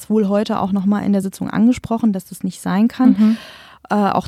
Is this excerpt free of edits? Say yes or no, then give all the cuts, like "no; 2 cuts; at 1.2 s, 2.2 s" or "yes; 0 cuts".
yes; 0 cuts